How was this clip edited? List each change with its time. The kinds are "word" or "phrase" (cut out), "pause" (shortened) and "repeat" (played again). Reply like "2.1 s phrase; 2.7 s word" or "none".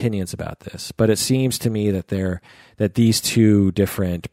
none

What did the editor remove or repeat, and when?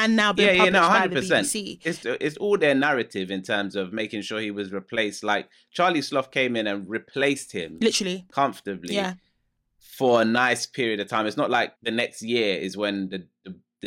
2.0 s word; 11.8 s pause

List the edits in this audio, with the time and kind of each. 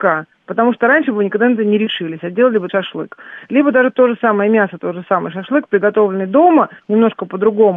2.7 s word

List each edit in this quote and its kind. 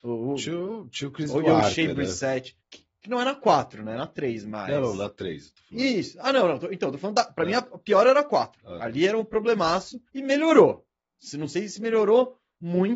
2.6 s pause; 10.1 s pause

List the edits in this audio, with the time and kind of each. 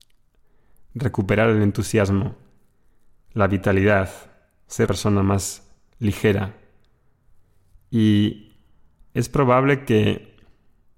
4.9 s word

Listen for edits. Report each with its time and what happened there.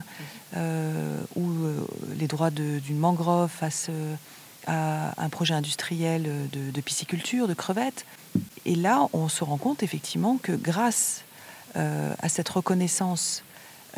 4.6 s pause

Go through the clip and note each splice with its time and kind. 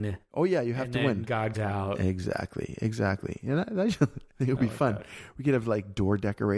1.5 s word

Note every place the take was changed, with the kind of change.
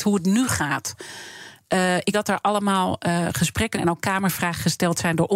2.1 s word; 3.7 s word

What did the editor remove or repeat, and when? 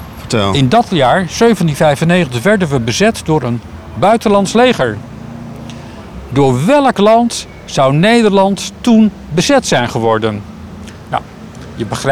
none

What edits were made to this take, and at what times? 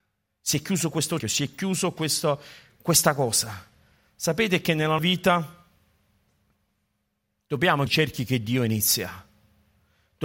1.2 s word; 5.0 s word; 7.9 s word

